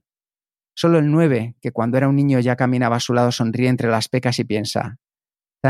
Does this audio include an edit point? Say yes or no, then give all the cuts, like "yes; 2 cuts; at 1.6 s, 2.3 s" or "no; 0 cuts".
no; 0 cuts